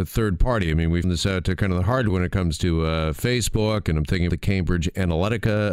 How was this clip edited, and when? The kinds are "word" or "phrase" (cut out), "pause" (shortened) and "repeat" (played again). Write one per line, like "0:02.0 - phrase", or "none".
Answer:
0:01.0 - word
0:02.1 - word
0:04.3 - word